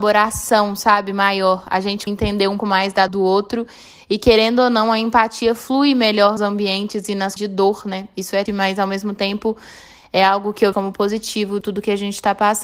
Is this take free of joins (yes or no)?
no